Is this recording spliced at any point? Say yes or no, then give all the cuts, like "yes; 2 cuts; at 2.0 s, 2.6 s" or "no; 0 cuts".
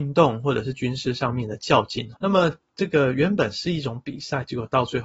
yes; 1 cut; at 2.2 s